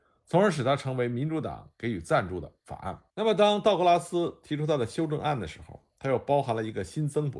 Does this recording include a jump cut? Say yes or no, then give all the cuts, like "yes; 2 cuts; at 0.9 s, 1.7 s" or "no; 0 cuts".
yes; 1 cut; at 3.1 s